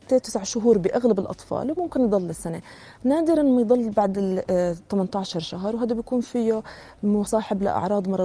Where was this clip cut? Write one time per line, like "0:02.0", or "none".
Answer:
none